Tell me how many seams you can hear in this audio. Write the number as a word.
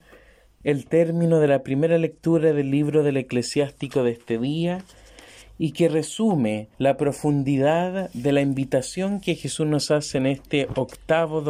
one